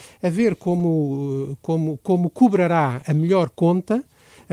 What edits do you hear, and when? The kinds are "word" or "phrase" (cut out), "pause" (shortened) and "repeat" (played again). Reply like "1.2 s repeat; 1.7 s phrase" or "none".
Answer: none